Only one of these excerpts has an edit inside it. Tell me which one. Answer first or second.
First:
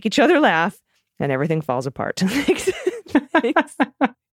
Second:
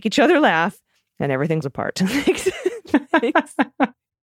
second